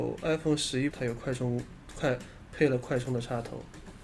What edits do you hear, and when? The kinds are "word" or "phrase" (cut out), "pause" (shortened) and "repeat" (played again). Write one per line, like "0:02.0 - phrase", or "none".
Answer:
0:00.9 - word